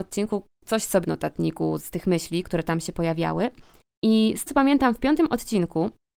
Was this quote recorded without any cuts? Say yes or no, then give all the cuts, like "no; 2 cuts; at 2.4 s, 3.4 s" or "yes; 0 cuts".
no; 4 cuts; at 1.0 s, 1.8 s, 2.4 s, 4.5 s